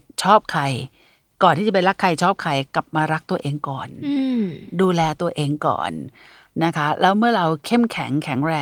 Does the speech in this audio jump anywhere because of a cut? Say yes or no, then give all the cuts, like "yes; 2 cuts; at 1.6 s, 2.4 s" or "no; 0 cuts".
no; 0 cuts